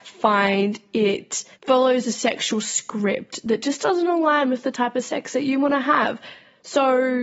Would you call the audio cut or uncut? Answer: cut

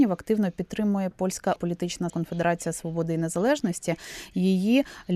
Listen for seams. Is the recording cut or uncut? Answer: cut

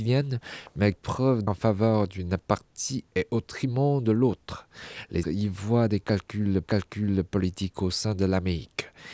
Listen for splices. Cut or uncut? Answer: cut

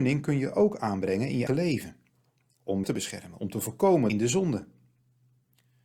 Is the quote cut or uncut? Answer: cut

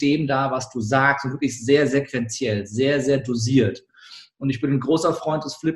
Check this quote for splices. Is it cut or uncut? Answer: uncut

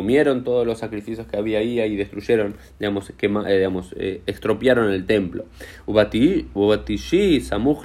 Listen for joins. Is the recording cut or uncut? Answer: uncut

